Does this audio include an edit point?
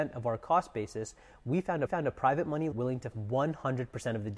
yes; 3 cuts; at 1.9 s, 2.7 s, 3.1 s

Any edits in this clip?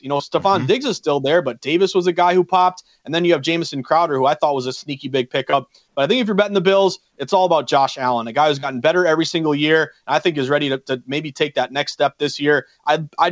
no; 0 cuts

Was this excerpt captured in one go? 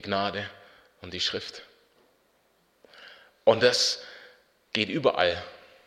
yes; 0 cuts

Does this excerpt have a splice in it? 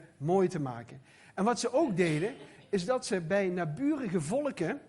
no; 0 cuts

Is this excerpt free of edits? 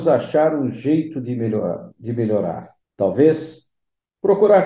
no; 1 cut; at 2.8 s

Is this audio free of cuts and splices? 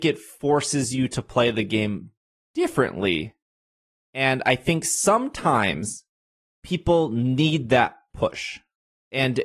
yes; 0 cuts

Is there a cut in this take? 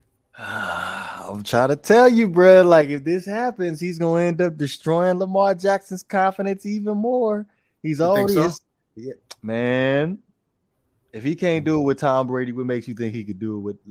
no; 0 cuts

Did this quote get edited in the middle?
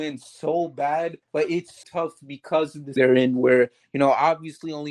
yes; 3 cuts; at 1.2 s, 1.8 s, 3.0 s

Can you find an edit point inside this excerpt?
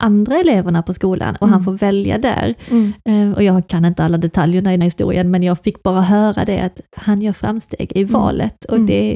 yes; 1 cut; at 4.8 s

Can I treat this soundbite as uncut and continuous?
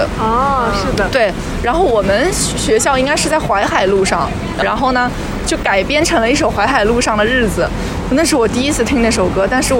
no; 1 cut; at 4.6 s

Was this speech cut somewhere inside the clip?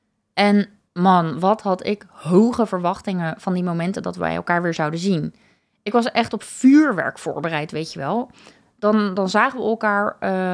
no; 0 cuts

